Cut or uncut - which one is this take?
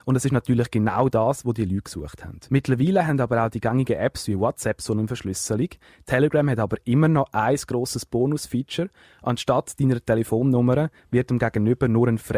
cut